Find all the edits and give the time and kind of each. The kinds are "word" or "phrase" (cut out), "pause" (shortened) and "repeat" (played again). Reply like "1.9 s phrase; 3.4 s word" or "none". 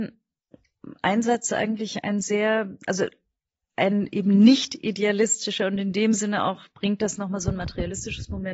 none